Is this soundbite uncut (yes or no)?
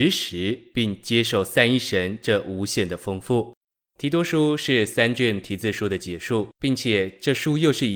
no